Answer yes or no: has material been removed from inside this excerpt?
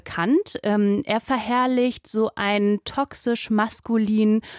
no